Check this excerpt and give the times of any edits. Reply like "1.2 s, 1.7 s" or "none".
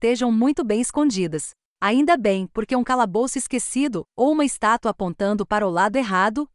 none